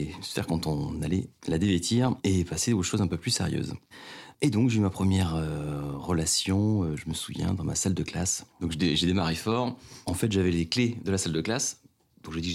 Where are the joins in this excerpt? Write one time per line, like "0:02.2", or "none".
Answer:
0:04.3